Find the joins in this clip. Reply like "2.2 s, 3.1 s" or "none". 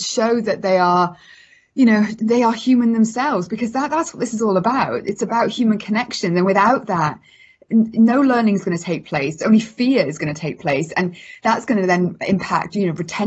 none